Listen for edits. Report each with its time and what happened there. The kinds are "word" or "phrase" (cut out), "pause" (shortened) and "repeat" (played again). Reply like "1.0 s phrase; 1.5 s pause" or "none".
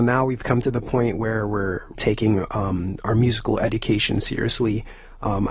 1.9 s word

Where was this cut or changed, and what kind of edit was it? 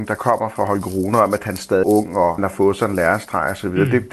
1.8 s word; 2.4 s word

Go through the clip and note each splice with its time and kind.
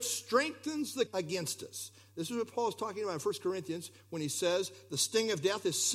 1.1 s phrase

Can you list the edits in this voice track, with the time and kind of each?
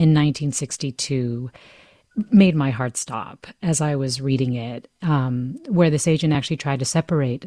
none

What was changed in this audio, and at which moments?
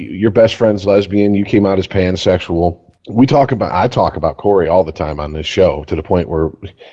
3.0 s pause

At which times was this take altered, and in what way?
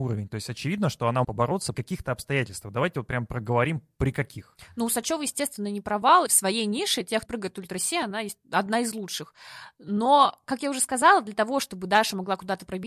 1.2 s word; 1.7 s word; 6.3 s word; 7.3 s phrase

